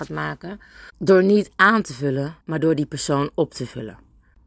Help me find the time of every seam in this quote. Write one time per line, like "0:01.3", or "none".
0:00.9
0:02.4

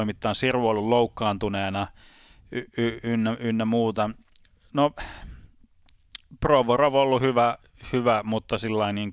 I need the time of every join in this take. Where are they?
none

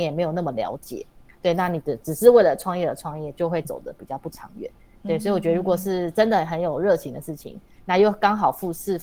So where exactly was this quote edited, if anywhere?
none

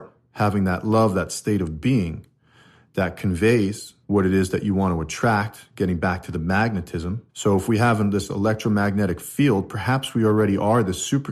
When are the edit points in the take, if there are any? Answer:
0:04.0
0:07.3

